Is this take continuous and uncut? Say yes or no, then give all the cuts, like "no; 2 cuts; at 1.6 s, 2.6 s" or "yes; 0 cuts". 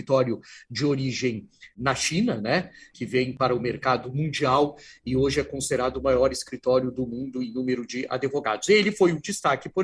yes; 0 cuts